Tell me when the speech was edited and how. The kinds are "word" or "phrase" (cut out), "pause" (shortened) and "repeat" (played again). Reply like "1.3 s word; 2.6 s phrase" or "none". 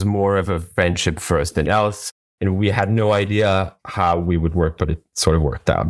1.6 s word; 3.8 s pause; 4.8 s word